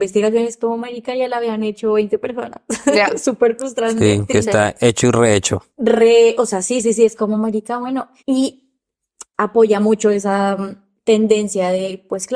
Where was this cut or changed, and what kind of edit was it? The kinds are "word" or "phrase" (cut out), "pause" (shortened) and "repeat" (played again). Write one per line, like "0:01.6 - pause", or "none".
0:05.7 - pause
0:08.2 - pause